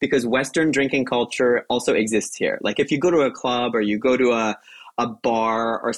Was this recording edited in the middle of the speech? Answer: no; 0 cuts

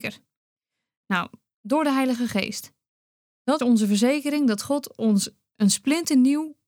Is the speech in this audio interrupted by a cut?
yes; 1 cut; at 3.6 s

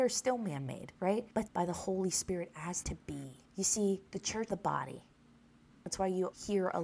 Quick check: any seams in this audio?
yes; 5 cuts; at 1.5 s, 2.8 s, 3.4 s, 4.1 s, 4.5 s

